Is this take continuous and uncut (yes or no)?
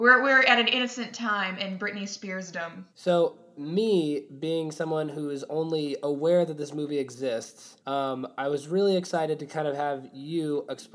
no